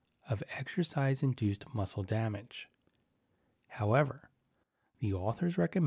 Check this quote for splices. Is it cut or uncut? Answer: uncut